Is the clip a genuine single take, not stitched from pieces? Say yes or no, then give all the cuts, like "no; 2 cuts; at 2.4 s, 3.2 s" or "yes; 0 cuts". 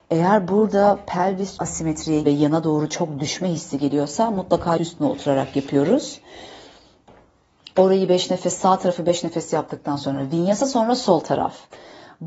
no; 3 cuts; at 1.6 s, 2.2 s, 4.8 s